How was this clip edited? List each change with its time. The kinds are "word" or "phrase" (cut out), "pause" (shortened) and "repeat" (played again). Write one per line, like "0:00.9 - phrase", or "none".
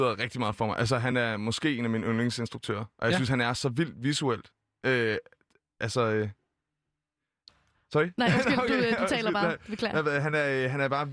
none

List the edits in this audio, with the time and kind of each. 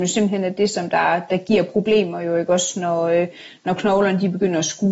none

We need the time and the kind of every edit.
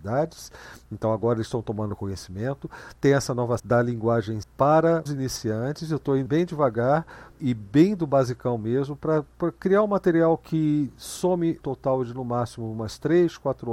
0:03.6 - word
0:04.4 - word
0:05.1 - word
0:06.3 - word
0:07.4 - word
0:11.6 - word

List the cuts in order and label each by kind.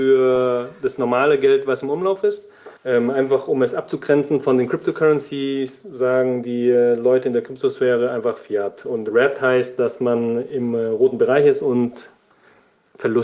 0:02.8 - pause

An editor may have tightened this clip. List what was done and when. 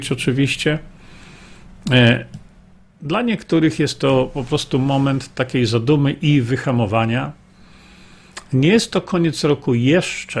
none

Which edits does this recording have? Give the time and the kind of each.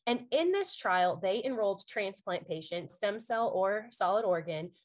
0:02.9 - word

